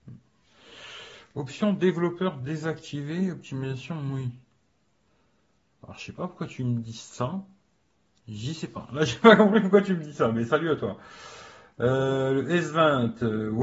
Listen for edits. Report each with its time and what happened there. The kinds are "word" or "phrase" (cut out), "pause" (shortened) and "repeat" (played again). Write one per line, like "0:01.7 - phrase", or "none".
none